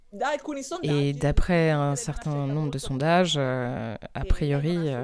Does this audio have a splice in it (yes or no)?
no